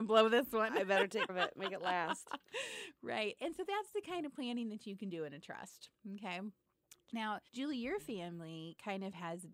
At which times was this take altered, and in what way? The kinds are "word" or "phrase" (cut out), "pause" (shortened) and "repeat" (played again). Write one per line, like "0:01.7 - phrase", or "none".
0:01.3 - word
0:07.5 - pause